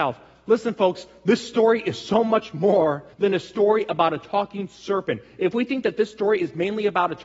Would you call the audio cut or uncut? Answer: cut